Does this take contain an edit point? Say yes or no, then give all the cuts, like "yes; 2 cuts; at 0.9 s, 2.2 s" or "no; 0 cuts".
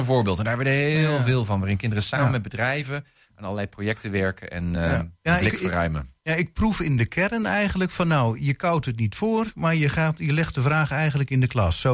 no; 0 cuts